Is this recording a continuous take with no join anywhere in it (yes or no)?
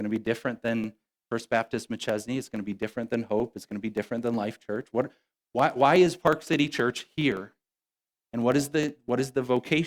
yes